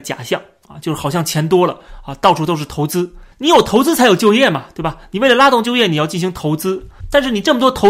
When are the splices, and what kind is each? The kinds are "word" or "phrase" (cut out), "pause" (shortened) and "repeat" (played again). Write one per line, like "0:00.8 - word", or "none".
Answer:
0:03.3 - pause